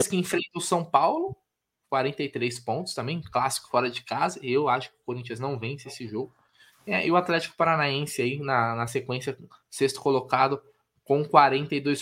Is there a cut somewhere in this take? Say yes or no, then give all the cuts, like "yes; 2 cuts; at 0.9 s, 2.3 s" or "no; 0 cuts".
no; 0 cuts